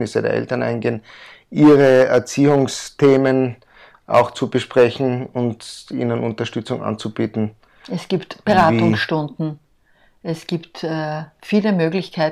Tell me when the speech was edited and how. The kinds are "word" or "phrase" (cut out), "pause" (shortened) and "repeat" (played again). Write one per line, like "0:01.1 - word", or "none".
none

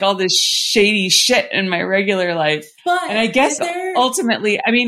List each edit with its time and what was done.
0:02.8 - pause
0:03.6 - word

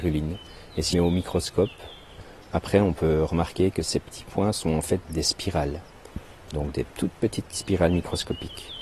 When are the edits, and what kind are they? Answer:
0:00.9 - phrase
0:05.0 - word
0:06.9 - pause

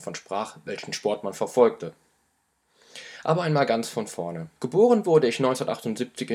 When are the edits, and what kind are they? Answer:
0:04.6 - pause

